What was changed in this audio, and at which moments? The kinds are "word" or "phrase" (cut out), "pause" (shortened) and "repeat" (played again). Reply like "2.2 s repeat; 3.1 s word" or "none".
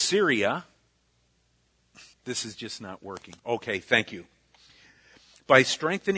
2.1 s pause; 3.4 s pause